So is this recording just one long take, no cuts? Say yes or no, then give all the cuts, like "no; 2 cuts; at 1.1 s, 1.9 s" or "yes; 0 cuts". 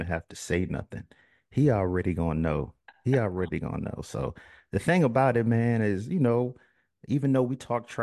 yes; 0 cuts